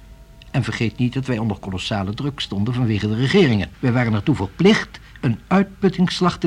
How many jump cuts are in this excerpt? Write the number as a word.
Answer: one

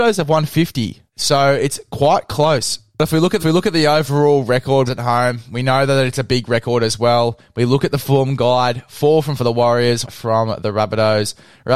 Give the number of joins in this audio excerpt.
five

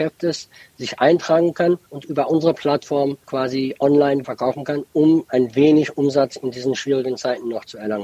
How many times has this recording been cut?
four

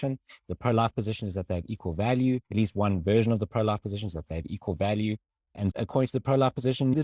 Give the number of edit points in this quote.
two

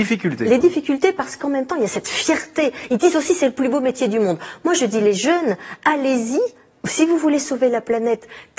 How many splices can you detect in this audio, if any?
zero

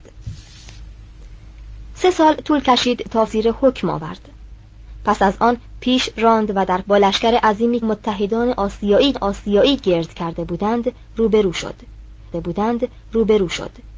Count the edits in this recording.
five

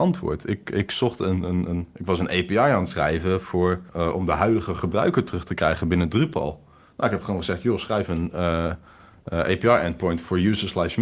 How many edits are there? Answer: one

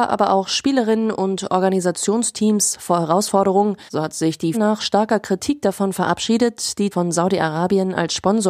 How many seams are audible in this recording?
three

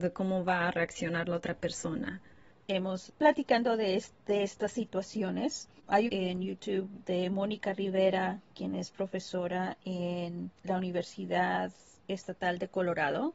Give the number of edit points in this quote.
three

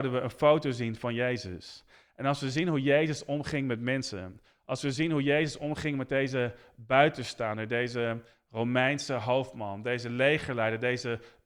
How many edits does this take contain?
zero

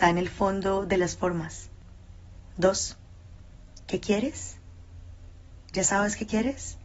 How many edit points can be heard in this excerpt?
zero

